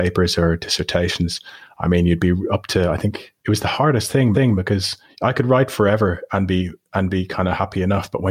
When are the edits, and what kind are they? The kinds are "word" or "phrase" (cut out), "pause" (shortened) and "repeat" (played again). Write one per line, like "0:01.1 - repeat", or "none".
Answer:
0:03.4 - pause
0:04.3 - repeat